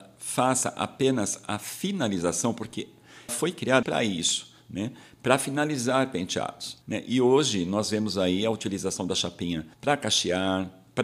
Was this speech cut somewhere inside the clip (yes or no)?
yes